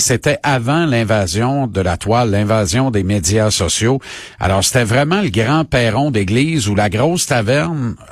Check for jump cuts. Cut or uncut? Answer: uncut